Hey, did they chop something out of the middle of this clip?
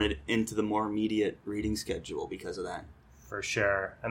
no; 0 cuts

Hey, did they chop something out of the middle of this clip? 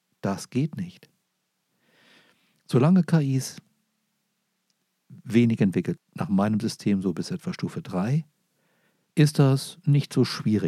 yes; 1 cut; at 6.0 s

